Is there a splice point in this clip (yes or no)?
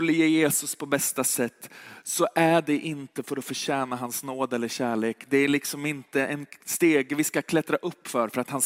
no